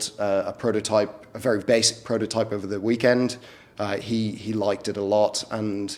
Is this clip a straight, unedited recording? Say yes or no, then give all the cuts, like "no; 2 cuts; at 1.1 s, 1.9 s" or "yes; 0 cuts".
no; 1 cut; at 1.6 s